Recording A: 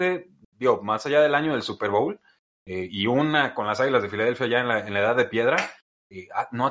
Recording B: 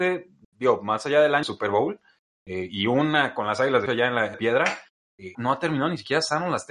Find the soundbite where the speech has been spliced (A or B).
B